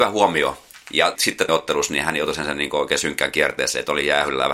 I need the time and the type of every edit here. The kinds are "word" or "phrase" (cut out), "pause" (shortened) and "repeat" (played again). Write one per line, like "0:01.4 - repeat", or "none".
0:01.2 - word
0:01.5 - phrase